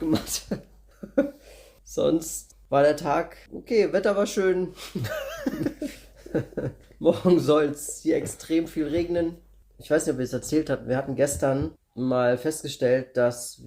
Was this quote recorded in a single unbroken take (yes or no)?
yes